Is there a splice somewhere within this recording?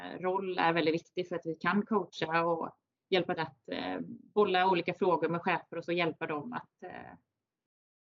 yes; 2 cuts; at 3.4 s, 5.9 s

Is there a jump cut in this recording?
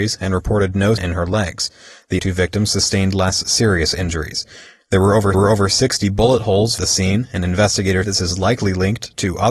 yes; 5 cuts; at 1.0 s, 2.2 s, 5.3 s, 6.8 s, 8.0 s

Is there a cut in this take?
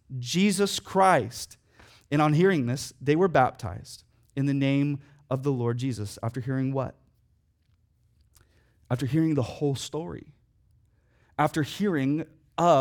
no; 0 cuts

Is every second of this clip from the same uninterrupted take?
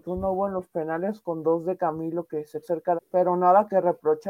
no; 2 cuts; at 2.6 s, 3.0 s

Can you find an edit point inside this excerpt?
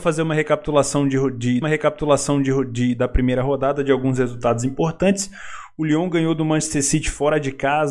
yes; 1 cut; at 1.6 s

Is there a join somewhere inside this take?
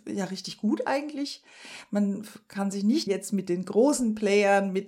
yes; 1 cut; at 3.1 s

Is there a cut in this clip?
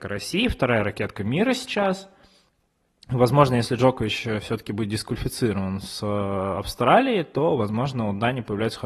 no; 0 cuts

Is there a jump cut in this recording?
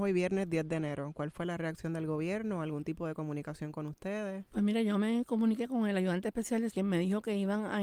yes; 2 cuts; at 4.5 s, 6.7 s

